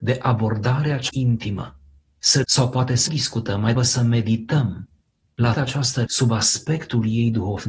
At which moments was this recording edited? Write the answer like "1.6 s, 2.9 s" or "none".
1.1 s, 2.4 s, 3.1 s, 3.7 s, 5.5 s, 6.1 s